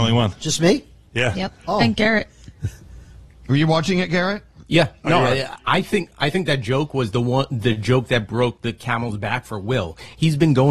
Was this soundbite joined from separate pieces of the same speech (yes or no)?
no